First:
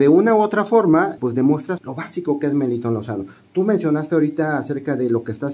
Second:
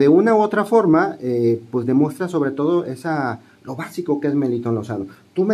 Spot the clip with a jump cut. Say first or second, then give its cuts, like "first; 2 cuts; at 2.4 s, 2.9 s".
first; 2 cuts; at 1.2 s, 1.8 s